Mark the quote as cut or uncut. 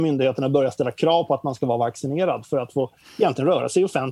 uncut